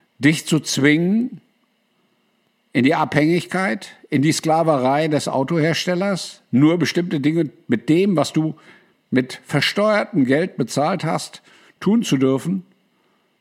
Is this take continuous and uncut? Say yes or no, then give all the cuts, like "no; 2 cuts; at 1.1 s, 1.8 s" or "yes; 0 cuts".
yes; 0 cuts